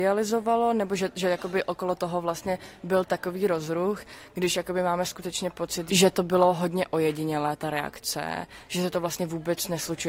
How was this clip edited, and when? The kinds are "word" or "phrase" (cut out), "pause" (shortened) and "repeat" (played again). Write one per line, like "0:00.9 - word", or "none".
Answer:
none